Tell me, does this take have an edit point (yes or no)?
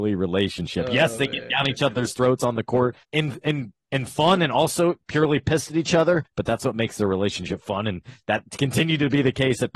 yes